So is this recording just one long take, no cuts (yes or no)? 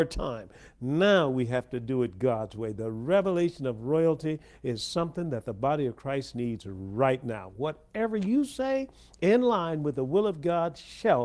yes